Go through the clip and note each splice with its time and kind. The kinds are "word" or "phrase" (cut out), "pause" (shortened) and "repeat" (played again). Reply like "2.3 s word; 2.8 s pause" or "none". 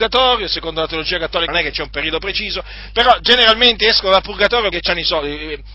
1.5 s word; 4.7 s word